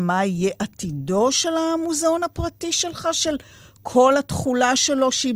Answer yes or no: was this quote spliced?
no